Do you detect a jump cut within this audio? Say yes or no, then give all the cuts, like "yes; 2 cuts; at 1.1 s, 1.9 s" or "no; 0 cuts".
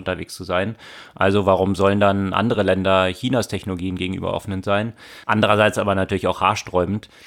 no; 0 cuts